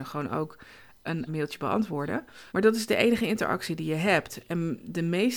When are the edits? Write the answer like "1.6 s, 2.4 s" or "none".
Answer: 1.3 s, 2.5 s